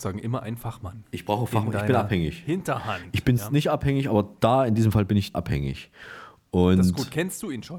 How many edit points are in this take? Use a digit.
2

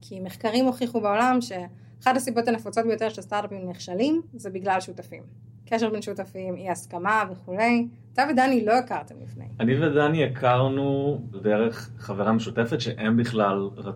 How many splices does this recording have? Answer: 2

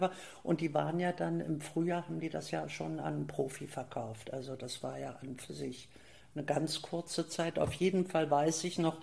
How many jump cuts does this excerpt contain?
0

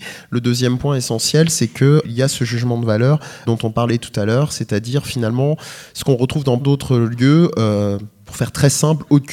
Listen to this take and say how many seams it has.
3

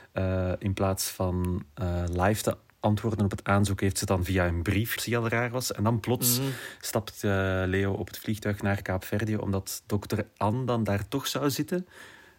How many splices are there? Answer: 1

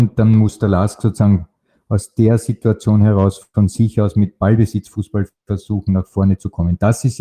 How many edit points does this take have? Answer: 0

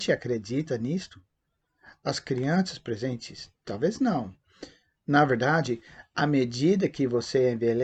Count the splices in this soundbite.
0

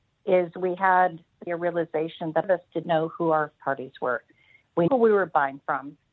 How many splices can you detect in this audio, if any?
5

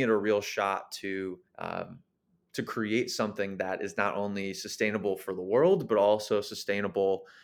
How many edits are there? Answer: 1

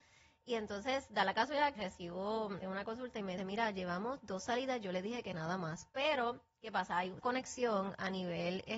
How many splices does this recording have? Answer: 4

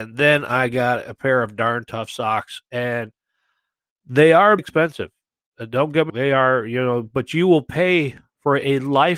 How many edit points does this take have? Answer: 2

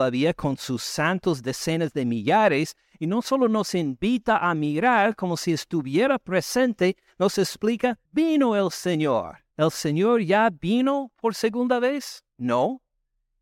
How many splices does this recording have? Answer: 3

